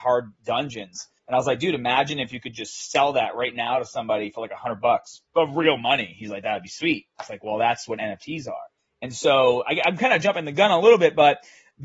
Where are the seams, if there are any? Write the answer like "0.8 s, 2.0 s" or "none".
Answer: 1.2 s, 5.3 s, 8.8 s